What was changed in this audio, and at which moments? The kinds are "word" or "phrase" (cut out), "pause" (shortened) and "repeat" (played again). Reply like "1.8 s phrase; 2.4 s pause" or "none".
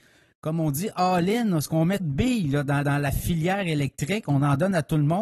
2.0 s word; 2.8 s repeat